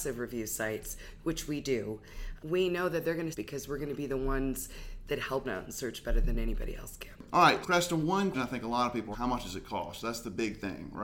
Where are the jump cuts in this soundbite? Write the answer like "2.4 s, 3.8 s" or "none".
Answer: 2.4 s, 3.3 s, 5.4 s, 7.6 s, 8.3 s, 9.1 s